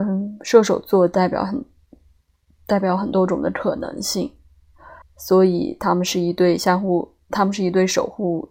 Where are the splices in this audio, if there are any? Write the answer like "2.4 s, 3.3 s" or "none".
5.0 s